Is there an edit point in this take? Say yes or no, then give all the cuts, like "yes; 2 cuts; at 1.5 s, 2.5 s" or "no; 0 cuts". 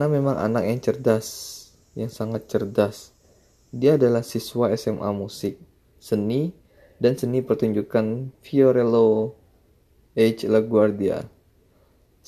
no; 0 cuts